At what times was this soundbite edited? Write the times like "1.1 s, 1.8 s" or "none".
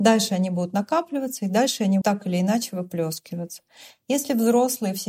2.0 s